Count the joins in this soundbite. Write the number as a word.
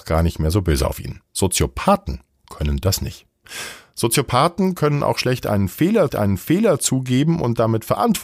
two